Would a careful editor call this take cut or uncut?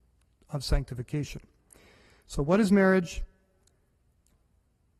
uncut